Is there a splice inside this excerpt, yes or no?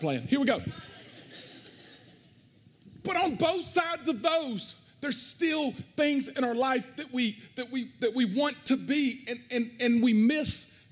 no